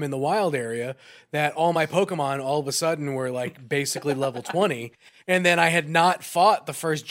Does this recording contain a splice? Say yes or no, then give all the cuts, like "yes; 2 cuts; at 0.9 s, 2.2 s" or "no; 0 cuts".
no; 0 cuts